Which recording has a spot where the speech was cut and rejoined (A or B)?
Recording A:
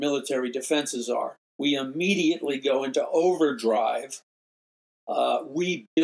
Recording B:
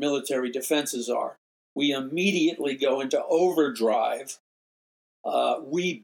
A